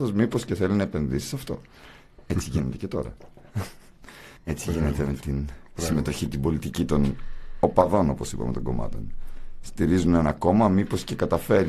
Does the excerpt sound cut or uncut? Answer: cut